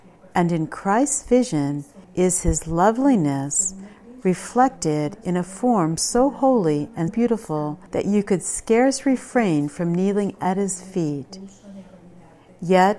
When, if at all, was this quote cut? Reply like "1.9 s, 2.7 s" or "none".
2.0 s, 7.1 s, 7.9 s